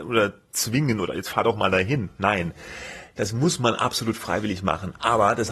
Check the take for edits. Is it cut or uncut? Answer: uncut